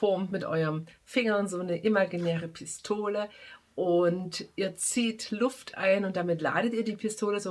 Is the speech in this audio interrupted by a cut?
no; 0 cuts

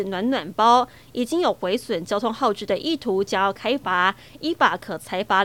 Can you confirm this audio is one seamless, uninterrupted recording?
yes; 0 cuts

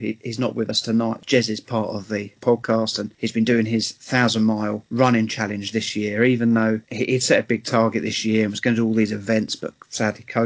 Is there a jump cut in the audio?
no; 0 cuts

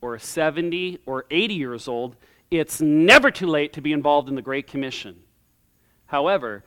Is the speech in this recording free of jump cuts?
yes; 0 cuts

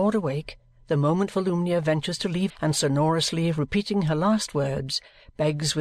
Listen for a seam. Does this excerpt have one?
yes; 1 cut; at 2.5 s

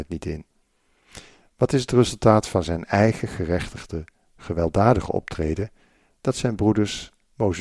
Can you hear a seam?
no; 0 cuts

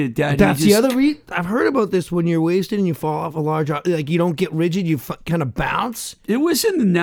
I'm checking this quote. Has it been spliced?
no; 0 cuts

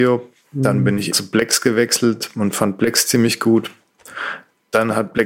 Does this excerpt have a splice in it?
yes; 1 cut; at 1.1 s

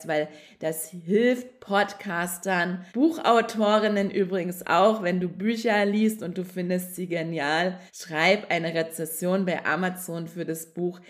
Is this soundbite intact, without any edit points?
no; 2 cuts; at 2.9 s, 7.9 s

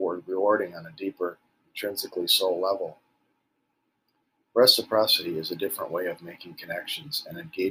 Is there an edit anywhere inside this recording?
no; 0 cuts

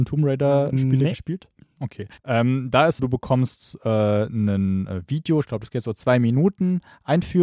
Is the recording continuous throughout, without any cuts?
no; 2 cuts; at 2.2 s, 3.0 s

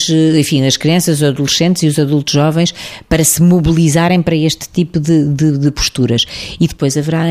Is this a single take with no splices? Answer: yes; 0 cuts

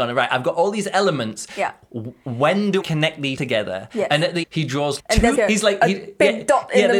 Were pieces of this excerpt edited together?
yes; 5 cuts; at 2.8 s, 3.3 s, 4.4 s, 5.0 s, 5.3 s

